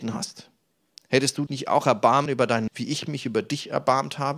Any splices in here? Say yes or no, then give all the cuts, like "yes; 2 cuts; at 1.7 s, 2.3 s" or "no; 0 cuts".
yes; 3 cuts; at 1.5 s, 2.3 s, 2.7 s